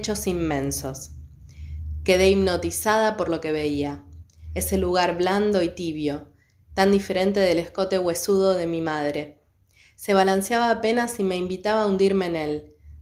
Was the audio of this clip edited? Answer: no; 0 cuts

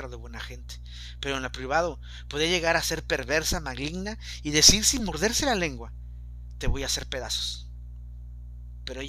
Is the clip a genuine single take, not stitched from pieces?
yes; 0 cuts

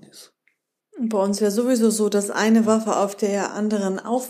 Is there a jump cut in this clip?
no; 0 cuts

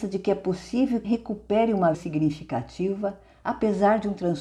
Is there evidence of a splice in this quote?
yes; 2 cuts; at 1.0 s, 1.9 s

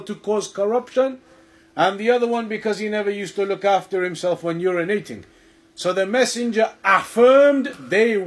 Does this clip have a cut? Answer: no; 0 cuts

